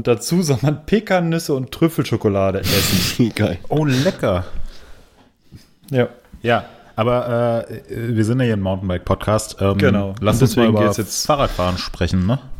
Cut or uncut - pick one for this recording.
uncut